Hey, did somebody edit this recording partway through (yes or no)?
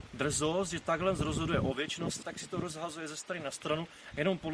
yes